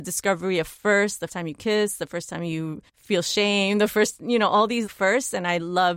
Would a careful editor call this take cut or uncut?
cut